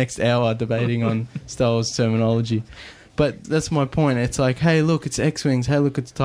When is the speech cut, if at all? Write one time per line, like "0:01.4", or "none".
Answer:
0:03.4

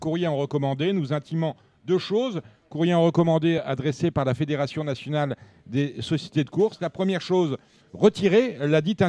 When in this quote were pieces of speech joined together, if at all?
none

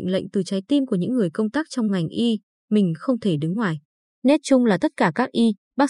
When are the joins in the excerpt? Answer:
none

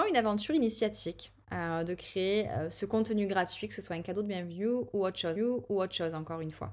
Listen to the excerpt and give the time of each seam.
0:05.4

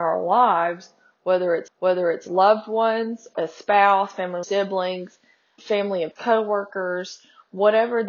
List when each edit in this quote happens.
0:01.7
0:03.3
0:04.4
0:05.6
0:06.2

